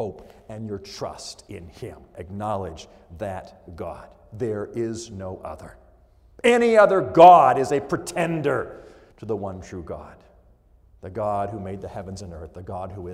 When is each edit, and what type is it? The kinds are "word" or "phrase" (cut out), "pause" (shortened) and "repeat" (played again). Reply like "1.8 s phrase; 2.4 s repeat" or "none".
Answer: 9.1 s pause